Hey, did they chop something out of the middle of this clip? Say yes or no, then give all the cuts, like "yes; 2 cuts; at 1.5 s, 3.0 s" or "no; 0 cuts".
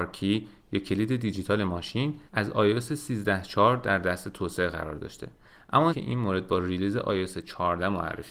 yes; 2 cuts; at 2.3 s, 5.9 s